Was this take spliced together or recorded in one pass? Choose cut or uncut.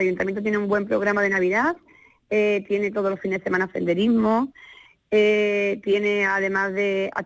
uncut